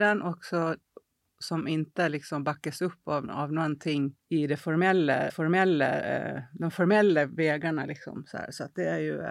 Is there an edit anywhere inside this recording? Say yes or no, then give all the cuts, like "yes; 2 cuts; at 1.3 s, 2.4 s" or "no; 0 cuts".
yes; 2 cuts; at 4.2 s, 5.3 s